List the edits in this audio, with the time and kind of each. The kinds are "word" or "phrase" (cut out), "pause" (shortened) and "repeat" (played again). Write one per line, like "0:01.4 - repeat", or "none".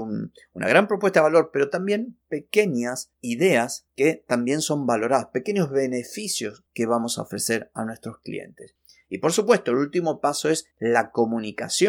none